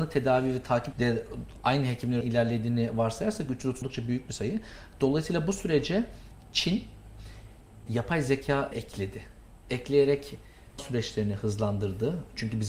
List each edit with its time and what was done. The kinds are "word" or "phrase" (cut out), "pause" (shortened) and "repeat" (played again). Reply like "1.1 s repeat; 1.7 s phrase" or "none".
0.9 s word; 2.2 s word; 3.8 s word; 7.9 s word; 8.7 s word; 10.8 s word